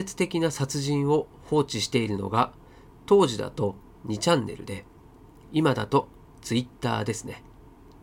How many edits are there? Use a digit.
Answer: 0